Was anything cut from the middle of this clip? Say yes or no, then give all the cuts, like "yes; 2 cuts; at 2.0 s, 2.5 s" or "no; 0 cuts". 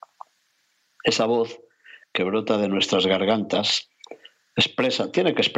no; 0 cuts